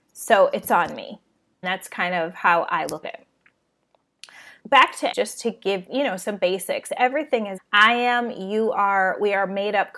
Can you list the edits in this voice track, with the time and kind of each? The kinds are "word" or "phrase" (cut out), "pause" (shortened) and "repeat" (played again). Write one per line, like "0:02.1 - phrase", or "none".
0:01.6 - word
0:03.0 - word
0:04.6 - word
0:05.1 - word
0:05.9 - word
0:07.6 - word